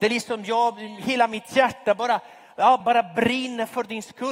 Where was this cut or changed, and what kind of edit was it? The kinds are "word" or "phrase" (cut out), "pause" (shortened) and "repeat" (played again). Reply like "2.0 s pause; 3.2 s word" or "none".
2.8 s word